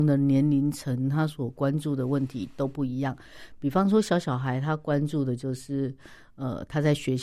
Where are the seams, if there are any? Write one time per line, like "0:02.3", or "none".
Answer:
none